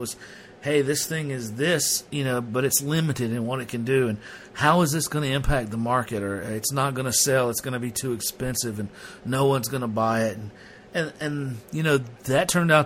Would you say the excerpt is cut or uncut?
uncut